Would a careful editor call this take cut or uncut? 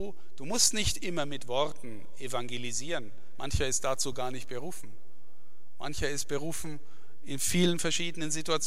uncut